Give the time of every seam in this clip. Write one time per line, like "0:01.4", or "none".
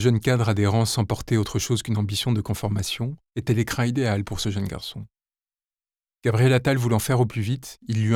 none